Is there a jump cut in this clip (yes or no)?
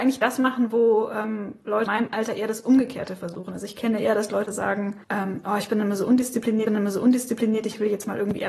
yes